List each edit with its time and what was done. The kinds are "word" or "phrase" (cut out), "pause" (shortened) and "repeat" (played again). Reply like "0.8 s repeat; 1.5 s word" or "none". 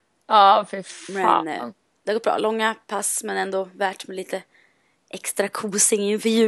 none

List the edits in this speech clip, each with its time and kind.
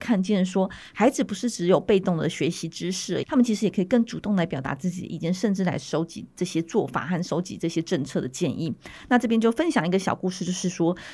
3.2 s word

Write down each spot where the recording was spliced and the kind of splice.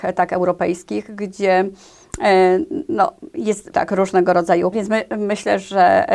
3.7 s word; 4.7 s word

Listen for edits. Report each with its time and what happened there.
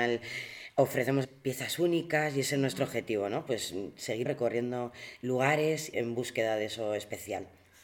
1.2 s phrase; 4.3 s word; 5.9 s word

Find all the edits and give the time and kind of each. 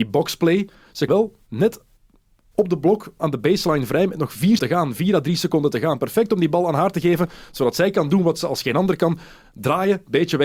1.1 s word; 3.2 s word; 4.6 s word

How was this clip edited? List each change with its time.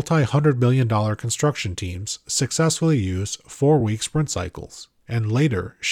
none

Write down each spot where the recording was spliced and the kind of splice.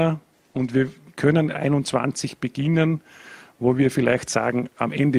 1.5 s phrase

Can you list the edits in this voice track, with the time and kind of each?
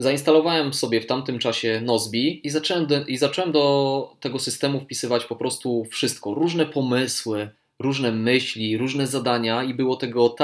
7.6 s pause

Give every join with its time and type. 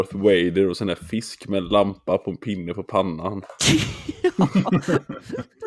none

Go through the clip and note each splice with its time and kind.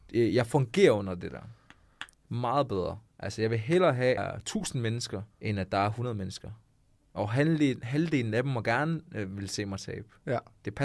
2.1 s pause; 4.2 s phrase; 5.3 s pause

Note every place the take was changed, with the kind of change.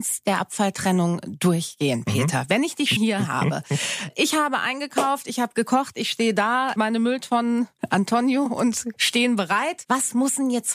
3.0 s word; 9.0 s word

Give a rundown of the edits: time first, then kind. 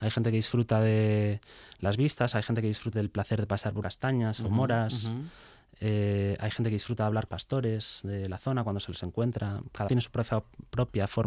2.9 s word; 3.8 s phrase; 7.3 s phrase; 9.9 s word

